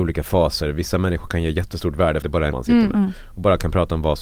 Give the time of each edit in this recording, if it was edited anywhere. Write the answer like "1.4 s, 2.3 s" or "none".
2.2 s, 2.5 s